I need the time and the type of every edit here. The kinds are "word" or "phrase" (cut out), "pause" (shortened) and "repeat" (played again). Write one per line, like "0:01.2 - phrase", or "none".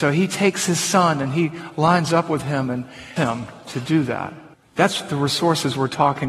0:03.2 - word